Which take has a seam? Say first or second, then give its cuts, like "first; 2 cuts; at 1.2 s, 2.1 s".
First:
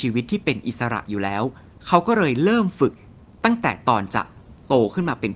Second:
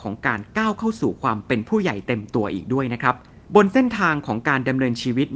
second; 1 cut; at 3.4 s